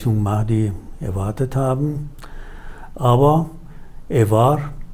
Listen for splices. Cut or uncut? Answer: uncut